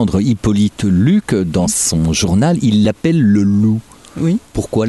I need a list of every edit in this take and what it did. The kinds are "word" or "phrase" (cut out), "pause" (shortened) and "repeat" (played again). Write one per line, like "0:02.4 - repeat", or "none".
none